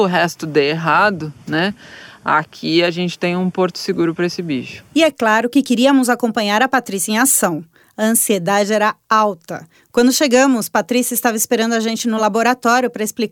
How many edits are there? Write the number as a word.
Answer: zero